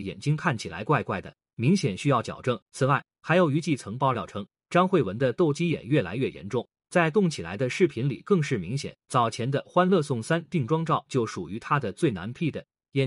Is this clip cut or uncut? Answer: cut